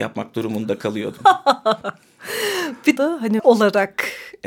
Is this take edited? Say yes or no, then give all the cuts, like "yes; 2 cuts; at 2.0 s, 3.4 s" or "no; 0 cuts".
yes; 2 cuts; at 3.0 s, 3.4 s